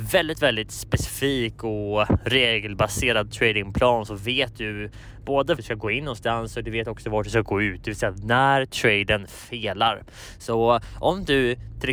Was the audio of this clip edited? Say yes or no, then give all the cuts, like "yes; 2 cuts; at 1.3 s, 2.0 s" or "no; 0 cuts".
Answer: yes; 1 cut; at 5.6 s